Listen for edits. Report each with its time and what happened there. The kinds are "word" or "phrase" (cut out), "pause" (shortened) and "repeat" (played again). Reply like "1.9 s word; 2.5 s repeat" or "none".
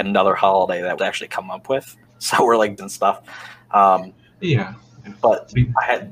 1.0 s phrase; 2.1 s pause; 2.8 s phrase